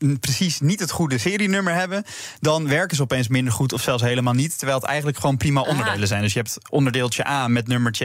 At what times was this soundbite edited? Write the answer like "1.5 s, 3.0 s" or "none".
none